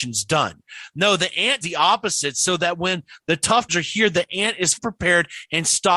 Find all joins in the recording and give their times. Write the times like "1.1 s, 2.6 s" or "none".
1.6 s, 3.7 s, 4.8 s